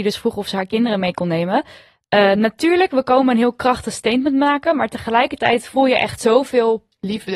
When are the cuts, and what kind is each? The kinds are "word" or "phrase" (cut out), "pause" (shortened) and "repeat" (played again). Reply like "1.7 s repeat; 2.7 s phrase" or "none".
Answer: none